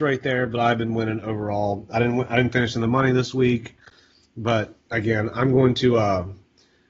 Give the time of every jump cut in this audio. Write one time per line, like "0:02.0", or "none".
0:04.8